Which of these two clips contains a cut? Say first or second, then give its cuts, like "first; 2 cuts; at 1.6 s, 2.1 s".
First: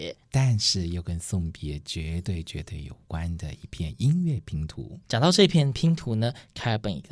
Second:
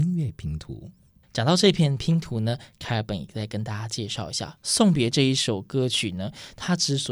first; 1 cut; at 5.0 s